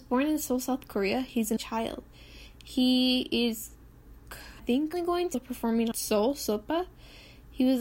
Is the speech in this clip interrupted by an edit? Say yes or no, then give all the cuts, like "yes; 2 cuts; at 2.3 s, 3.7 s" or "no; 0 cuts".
yes; 5 cuts; at 1.6 s, 4.6 s, 4.9 s, 5.3 s, 5.9 s